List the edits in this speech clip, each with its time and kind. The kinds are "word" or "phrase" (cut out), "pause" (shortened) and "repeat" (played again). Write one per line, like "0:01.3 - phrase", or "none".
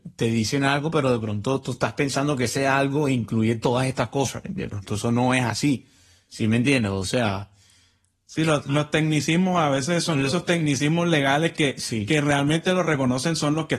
none